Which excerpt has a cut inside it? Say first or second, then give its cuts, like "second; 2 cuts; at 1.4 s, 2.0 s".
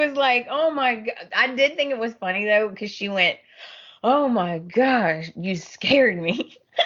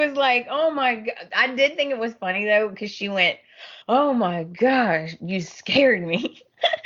second; 1 cut; at 3.8 s